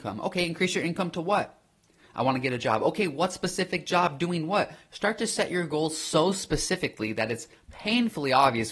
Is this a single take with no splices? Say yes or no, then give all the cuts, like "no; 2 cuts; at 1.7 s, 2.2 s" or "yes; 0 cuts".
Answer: yes; 0 cuts